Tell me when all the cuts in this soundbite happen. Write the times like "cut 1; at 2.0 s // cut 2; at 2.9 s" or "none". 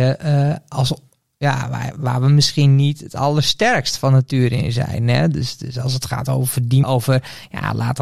cut 1; at 6.8 s